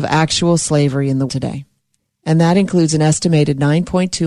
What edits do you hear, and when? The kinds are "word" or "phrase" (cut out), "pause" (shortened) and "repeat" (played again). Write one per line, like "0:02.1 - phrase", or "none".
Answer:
0:01.3 - word
0:02.0 - pause